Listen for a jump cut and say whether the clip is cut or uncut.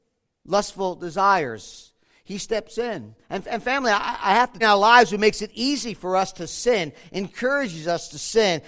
cut